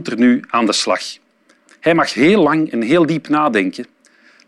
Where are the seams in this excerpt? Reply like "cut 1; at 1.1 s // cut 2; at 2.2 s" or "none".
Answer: none